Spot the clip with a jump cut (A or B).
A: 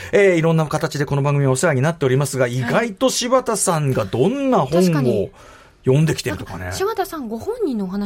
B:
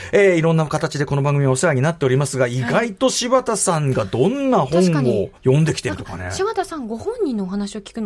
B